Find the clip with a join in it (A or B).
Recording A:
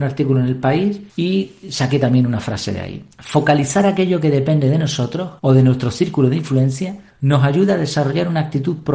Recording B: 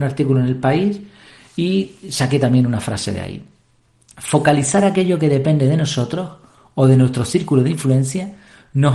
A